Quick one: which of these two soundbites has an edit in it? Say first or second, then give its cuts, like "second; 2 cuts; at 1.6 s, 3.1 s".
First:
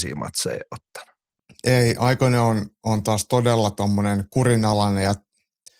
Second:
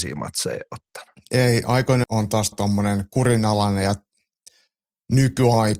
second; 3 cuts; at 1.1 s, 2.0 s, 2.5 s